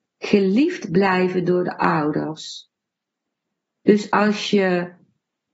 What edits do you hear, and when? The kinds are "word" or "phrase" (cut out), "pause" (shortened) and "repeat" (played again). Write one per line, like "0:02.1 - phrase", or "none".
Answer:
none

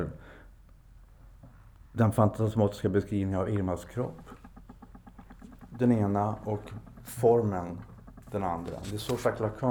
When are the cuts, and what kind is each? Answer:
none

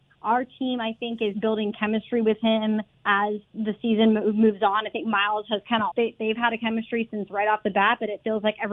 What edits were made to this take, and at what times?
0:01.3 - word
0:03.4 - pause
0:05.9 - word

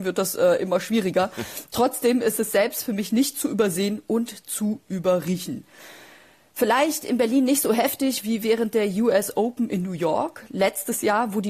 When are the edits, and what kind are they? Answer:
none

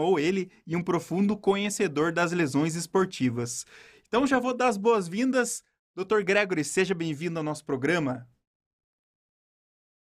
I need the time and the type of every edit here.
none

